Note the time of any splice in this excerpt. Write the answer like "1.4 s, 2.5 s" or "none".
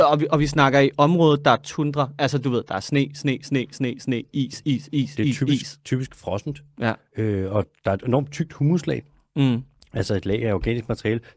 none